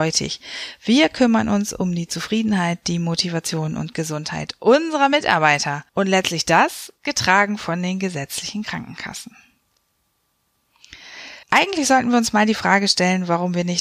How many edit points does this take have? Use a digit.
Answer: 2